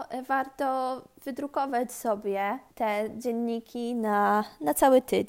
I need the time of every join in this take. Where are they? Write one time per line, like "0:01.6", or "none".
0:02.7